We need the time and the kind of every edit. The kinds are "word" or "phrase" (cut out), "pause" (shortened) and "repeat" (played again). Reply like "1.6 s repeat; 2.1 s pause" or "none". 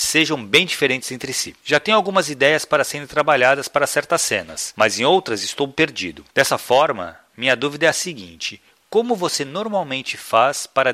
none